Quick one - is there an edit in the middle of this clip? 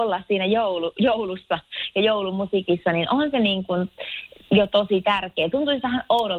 no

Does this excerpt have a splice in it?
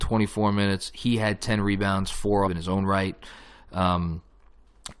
yes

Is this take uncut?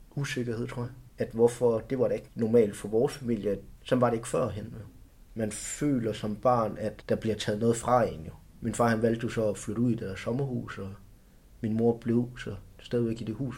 yes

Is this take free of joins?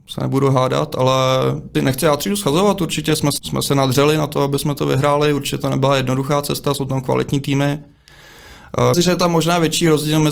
no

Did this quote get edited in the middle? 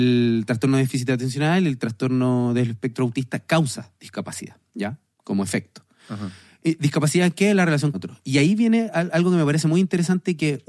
yes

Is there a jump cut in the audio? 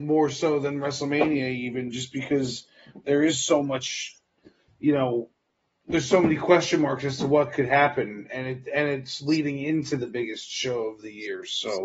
no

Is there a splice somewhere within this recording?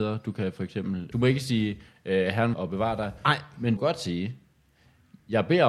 yes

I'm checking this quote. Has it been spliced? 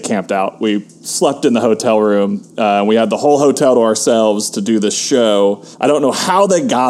yes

